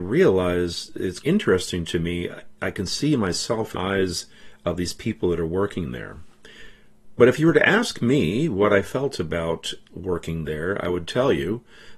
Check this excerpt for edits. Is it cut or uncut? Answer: cut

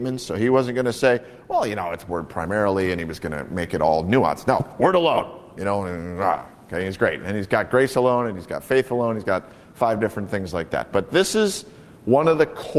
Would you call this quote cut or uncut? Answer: uncut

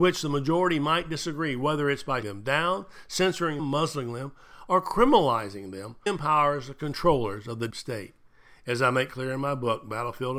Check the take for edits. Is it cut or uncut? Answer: cut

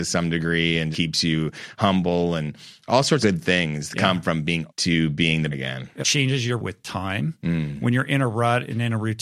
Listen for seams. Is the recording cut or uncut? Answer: cut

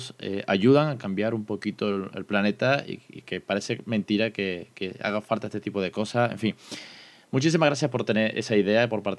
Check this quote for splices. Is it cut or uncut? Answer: uncut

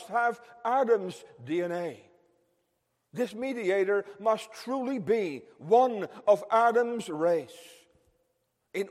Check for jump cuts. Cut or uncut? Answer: uncut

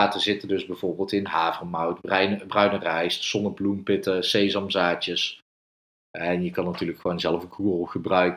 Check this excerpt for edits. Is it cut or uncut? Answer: uncut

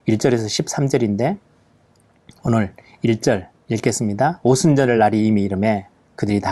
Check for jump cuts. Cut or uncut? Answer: uncut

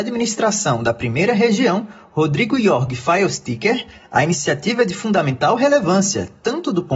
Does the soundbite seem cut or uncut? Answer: uncut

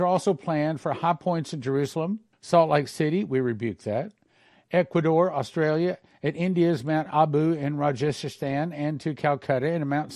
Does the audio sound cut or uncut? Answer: cut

